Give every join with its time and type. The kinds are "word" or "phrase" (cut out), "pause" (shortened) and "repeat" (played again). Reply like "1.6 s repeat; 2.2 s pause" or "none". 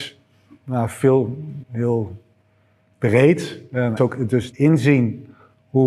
1.6 s word; 4.0 s word; 4.5 s word